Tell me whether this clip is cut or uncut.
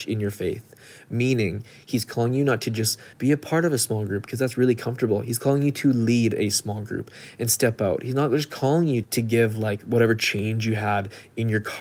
cut